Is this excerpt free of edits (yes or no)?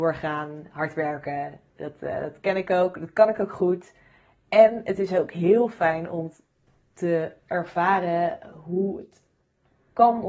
yes